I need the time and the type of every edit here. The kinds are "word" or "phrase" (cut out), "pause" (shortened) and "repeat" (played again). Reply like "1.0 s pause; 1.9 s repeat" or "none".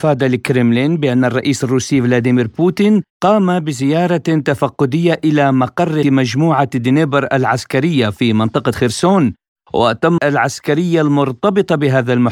3.1 s pause; 6.0 s word; 10.2 s phrase